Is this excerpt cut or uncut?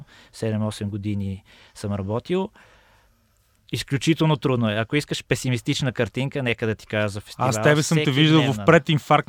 uncut